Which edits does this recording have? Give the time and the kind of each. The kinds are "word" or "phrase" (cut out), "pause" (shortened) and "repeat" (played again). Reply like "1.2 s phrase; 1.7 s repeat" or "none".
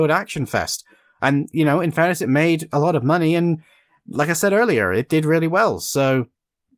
none